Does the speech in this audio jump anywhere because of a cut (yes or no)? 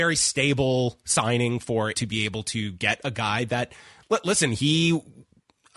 yes